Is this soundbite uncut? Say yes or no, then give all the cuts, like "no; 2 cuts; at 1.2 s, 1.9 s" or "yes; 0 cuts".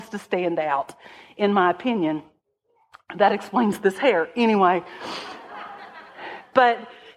yes; 0 cuts